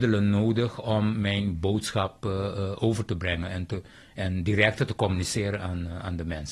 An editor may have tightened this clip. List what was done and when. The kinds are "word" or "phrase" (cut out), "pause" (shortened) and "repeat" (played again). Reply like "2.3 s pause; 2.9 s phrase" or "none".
none